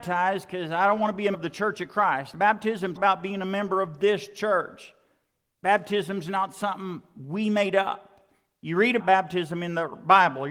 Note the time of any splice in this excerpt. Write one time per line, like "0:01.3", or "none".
0:01.3
0:03.0
0:09.0